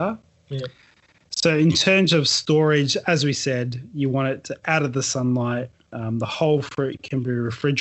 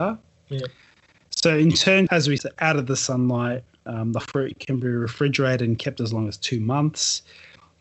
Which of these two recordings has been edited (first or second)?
second